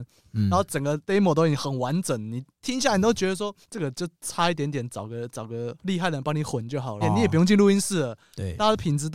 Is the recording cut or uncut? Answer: cut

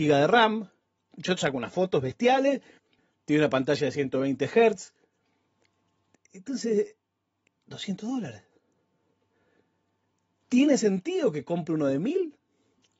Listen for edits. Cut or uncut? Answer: cut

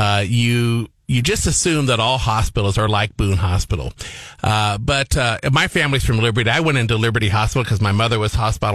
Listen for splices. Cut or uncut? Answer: uncut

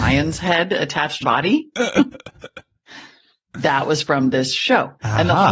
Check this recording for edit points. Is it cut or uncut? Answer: cut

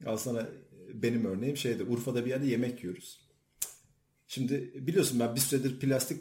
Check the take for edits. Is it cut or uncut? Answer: uncut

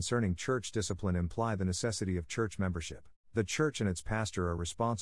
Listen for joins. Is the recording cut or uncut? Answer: cut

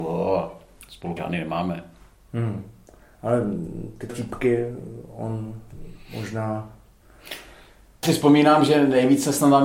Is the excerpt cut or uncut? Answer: cut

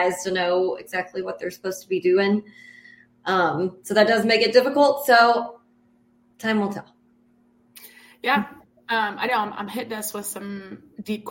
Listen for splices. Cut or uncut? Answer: uncut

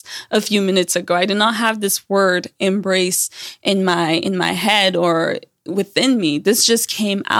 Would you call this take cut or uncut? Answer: uncut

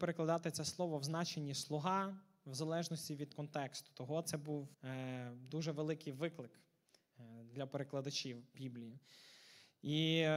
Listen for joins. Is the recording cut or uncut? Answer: cut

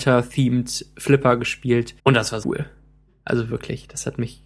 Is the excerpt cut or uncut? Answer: cut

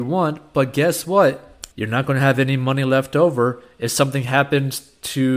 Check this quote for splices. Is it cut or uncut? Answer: cut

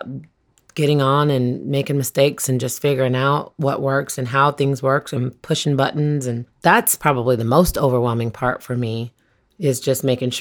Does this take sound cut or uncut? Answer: uncut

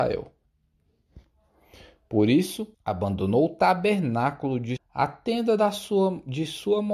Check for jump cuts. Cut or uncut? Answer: cut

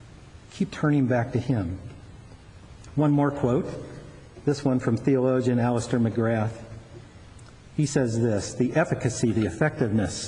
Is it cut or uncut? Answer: uncut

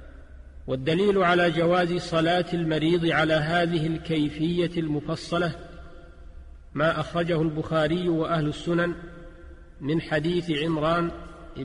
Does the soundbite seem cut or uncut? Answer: uncut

